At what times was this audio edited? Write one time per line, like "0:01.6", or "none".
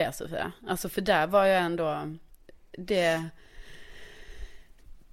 none